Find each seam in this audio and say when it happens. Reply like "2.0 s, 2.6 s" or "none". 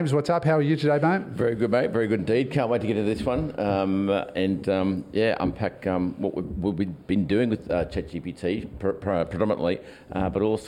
none